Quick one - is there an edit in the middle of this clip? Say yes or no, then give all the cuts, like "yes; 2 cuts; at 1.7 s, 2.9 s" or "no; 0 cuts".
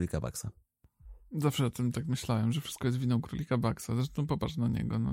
no; 0 cuts